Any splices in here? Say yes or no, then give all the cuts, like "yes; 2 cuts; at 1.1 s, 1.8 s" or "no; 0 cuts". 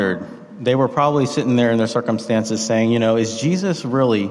no; 0 cuts